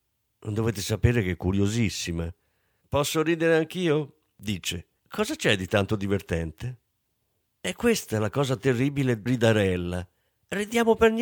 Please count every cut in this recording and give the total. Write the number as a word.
two